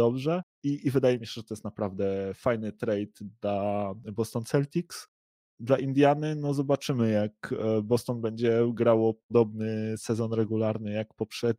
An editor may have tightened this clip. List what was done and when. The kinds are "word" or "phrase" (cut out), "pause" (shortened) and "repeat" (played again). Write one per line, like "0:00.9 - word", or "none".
none

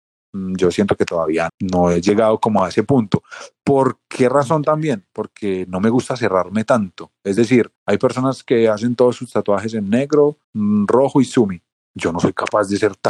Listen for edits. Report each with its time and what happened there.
0:01.5 - word
0:07.8 - pause
0:10.4 - pause
0:11.7 - pause

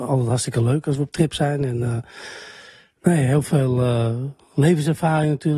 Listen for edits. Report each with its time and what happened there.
none

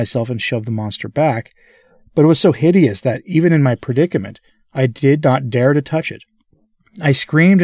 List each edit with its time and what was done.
none

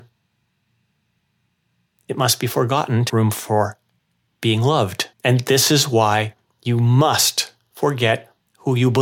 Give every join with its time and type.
0:03.1 - word
0:05.1 - pause

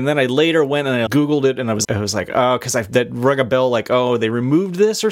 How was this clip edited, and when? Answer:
0:01.1 - word
0:01.8 - word

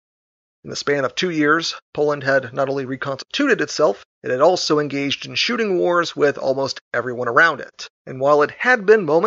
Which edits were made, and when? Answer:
0:04.1 - pause
0:08.0 - pause

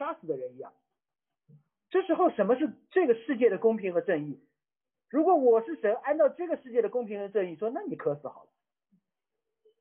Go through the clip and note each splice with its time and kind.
none

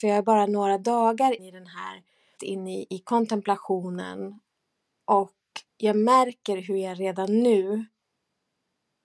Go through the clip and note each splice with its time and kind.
0:01.4 - word
0:02.4 - word
0:05.7 - pause

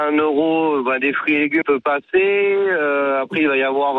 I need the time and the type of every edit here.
0:01.6 - word

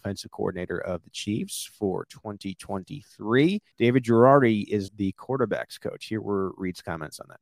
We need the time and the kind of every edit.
0:03.7 - pause
0:04.9 - word

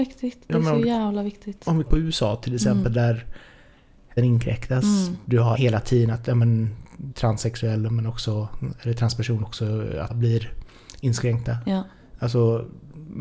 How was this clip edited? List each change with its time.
0:01.9 - word
0:04.2 - word
0:05.5 - word
0:07.1 - word
0:09.4 - word
0:10.1 - word

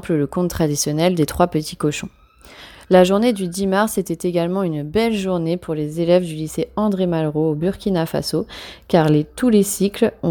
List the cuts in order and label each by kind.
none

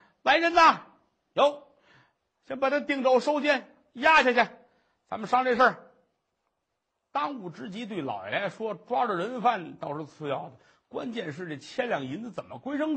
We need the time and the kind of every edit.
none

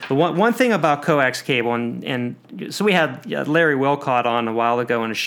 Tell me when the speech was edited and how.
none

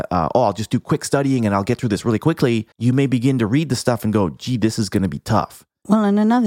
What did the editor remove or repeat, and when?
0:02.7 - pause

